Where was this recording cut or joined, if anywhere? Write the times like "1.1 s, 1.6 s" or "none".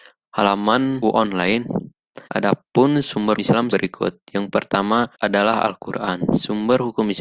1.0 s, 2.2 s, 3.4 s, 3.7 s, 5.1 s

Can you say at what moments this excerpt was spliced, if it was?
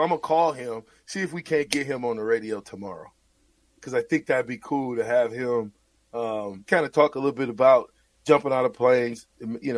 6.7 s

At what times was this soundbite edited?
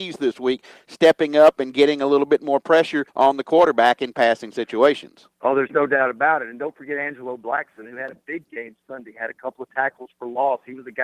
3.1 s, 5.3 s

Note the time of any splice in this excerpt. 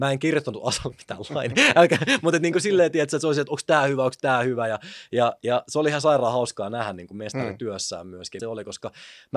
8.4 s

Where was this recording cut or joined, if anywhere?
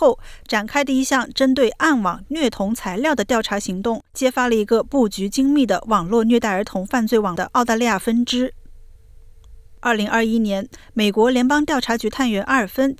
4.1 s

